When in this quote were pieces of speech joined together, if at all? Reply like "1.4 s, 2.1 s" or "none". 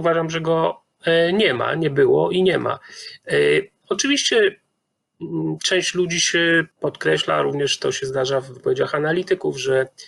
6.7 s